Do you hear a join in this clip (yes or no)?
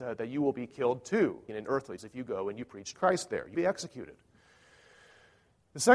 yes